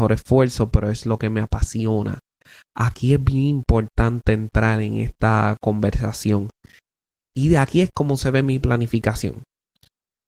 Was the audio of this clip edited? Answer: no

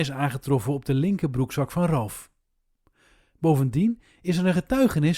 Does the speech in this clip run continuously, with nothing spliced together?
yes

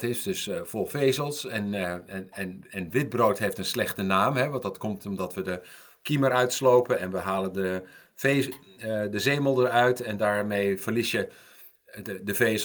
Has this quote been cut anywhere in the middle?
no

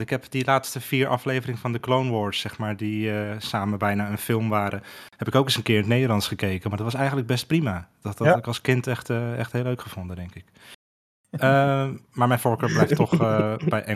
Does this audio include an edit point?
no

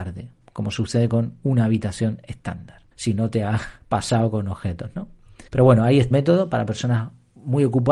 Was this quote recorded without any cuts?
no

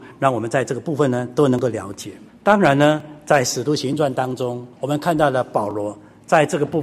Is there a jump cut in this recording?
yes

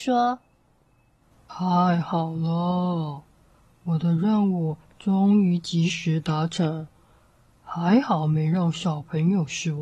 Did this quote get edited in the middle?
no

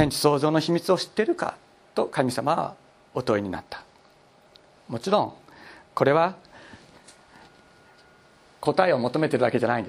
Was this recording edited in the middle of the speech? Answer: no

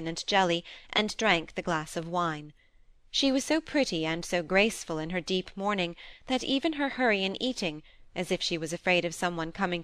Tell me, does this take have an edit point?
no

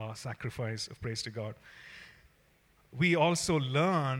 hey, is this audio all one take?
yes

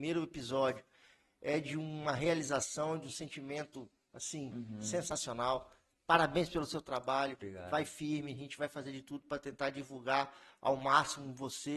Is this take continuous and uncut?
yes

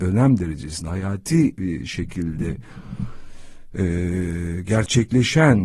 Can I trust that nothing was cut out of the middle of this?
yes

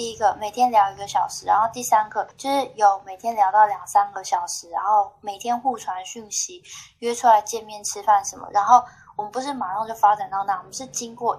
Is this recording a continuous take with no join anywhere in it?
no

